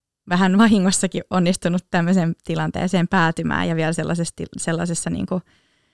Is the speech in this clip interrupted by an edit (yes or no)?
no